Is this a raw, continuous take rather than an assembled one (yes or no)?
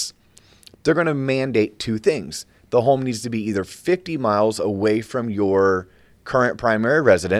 yes